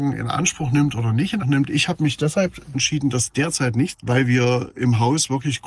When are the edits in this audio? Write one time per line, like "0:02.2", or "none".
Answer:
0:01.4
0:02.7
0:03.9